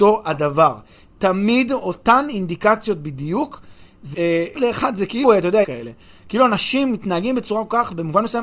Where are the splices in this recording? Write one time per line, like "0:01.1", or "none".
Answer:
0:04.1
0:04.5
0:05.2
0:05.6